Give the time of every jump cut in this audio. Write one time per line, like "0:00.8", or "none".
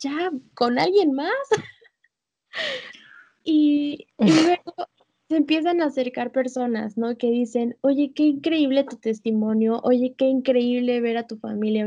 none